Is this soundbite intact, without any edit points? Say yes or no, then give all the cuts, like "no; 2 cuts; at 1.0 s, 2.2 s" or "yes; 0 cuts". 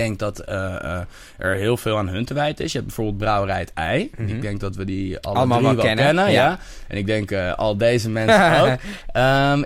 yes; 0 cuts